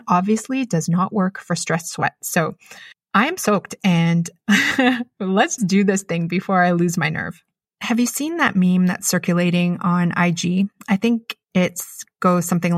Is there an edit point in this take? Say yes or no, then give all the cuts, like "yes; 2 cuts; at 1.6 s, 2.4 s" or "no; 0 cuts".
yes; 4 cuts; at 2.9 s, 5.6 s, 7.6 s, 11.4 s